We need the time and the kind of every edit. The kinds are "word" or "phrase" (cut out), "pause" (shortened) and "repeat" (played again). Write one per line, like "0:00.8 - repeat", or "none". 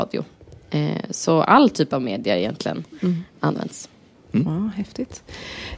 none

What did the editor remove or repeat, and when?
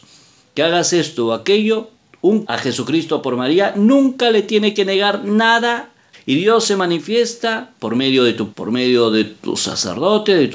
0:02.4 - word
0:06.1 - phrase
0:08.5 - word

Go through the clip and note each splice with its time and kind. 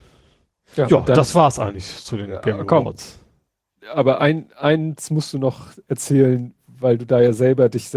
none

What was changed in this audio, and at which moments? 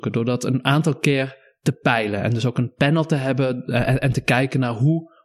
none

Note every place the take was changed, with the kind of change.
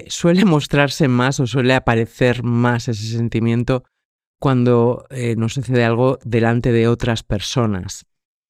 none

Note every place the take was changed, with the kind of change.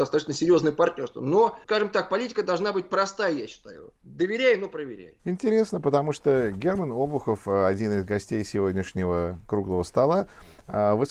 0:01.6 - word
0:04.0 - pause
0:05.2 - pause

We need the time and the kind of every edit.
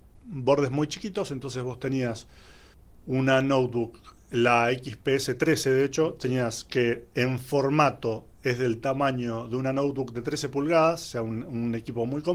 0:02.7 - pause
0:04.2 - pause
0:07.1 - pause

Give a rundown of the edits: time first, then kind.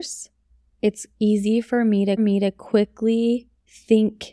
0:02.2 - repeat

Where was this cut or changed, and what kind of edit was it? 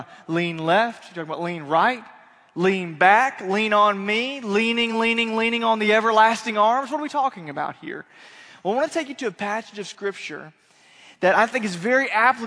none

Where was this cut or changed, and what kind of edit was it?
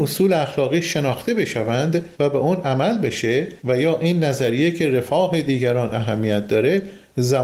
0:02.1 - pause
0:03.6 - pause

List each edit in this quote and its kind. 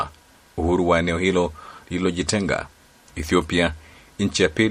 none

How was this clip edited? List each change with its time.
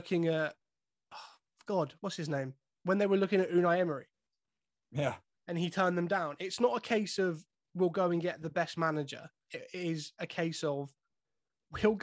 none

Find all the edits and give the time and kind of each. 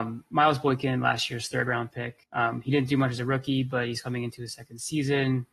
0:02.2 - pause

